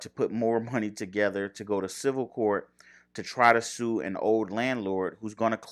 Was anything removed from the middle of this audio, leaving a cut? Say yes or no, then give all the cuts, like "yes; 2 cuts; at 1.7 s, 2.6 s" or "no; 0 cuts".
no; 0 cuts